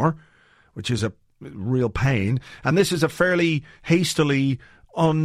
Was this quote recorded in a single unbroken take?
yes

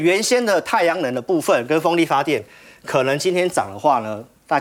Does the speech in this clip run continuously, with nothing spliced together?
yes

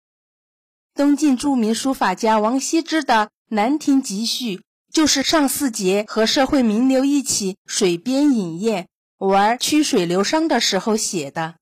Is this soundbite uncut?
yes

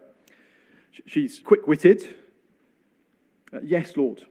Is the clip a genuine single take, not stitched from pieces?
no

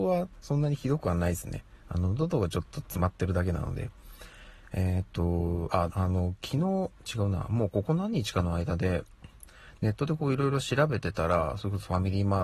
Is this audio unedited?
no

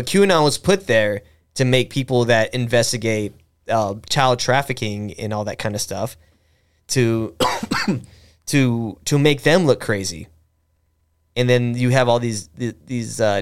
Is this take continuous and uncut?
yes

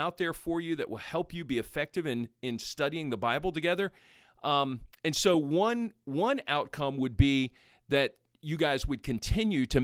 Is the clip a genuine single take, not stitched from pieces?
yes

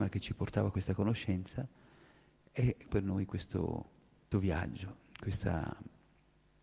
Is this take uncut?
no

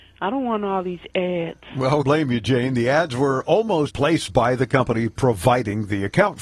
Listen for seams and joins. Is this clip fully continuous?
no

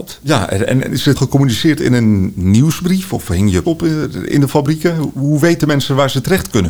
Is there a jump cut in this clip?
yes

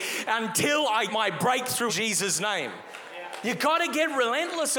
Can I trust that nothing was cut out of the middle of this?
no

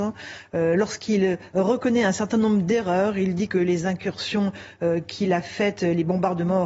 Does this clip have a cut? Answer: no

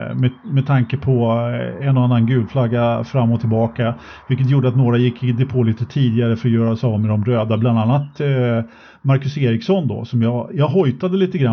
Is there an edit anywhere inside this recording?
no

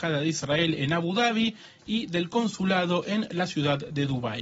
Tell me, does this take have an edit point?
no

